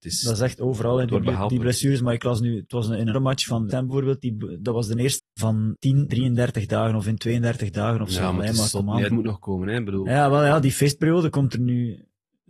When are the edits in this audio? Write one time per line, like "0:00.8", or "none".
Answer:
0:03.1
0:03.7
0:05.2
0:05.8
0:06.1
0:09.1